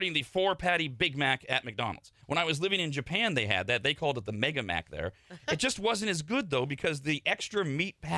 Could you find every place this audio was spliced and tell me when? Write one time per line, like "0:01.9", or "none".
0:02.2